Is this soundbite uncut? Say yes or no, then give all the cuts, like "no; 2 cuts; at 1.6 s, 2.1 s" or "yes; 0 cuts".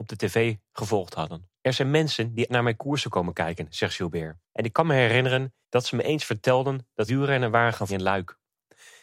no; 6 cuts; at 1.5 s, 2.5 s, 4.4 s, 5.6 s, 7.1 s, 7.9 s